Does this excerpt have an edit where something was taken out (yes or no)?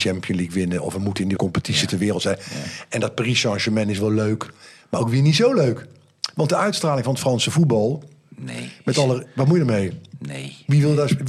yes